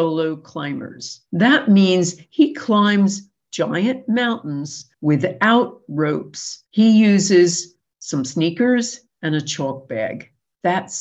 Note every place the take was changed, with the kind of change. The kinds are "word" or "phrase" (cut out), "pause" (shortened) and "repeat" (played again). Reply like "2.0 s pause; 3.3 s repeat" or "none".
1.3 s pause; 4.9 s pause; 6.7 s pause